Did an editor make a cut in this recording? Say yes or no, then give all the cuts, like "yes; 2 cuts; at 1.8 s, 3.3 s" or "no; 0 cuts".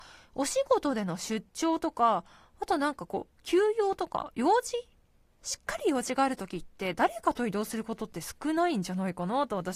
no; 0 cuts